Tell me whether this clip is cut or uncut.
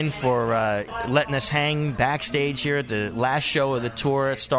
uncut